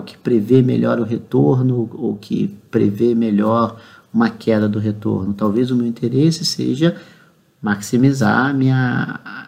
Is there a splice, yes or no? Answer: no